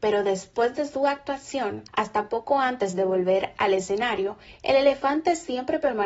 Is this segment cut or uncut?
cut